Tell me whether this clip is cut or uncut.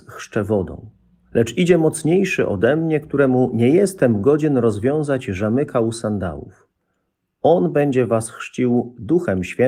uncut